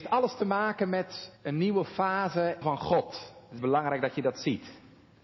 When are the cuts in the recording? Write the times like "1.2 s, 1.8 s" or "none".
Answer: 1.4 s, 2.6 s, 3.6 s